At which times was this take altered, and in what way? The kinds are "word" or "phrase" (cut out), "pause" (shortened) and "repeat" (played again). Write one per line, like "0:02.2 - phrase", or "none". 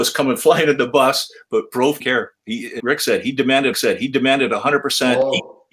0:02.0 - word
0:02.8 - word
0:03.7 - repeat